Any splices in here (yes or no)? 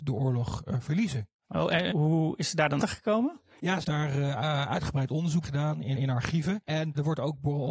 yes